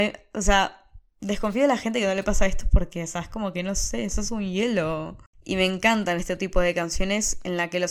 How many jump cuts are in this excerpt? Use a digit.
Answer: 1